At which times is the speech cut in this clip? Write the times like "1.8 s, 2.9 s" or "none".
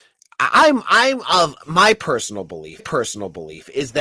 2.8 s